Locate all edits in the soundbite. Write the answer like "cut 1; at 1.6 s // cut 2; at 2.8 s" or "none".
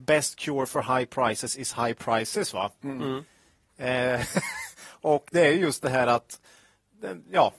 none